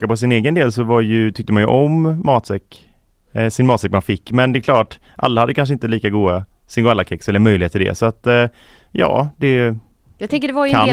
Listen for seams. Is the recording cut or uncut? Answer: uncut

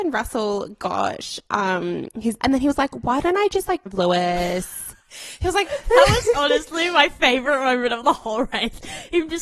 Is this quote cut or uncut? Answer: cut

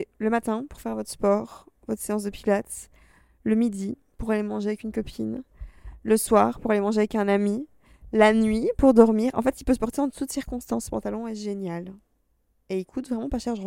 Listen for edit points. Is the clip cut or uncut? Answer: uncut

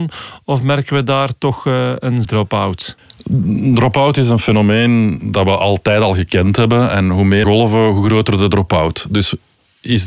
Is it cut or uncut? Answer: cut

